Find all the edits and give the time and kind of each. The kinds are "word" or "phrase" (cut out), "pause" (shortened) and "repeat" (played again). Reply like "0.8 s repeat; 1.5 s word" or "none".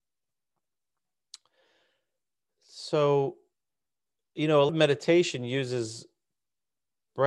4.7 s word